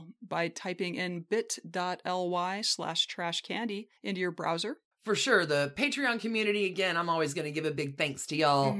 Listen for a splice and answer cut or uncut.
cut